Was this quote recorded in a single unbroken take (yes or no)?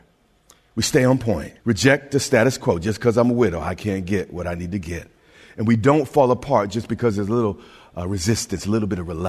no